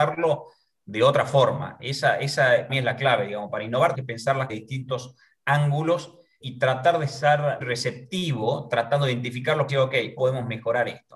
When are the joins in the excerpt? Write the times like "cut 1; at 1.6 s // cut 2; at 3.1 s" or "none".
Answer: cut 1; at 2.7 s // cut 2; at 3.9 s // cut 3; at 4.5 s // cut 4; at 6.4 s // cut 5; at 7.6 s // cut 6; at 9.7 s // cut 7; at 10.2 s